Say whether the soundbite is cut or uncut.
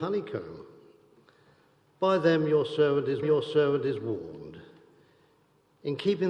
cut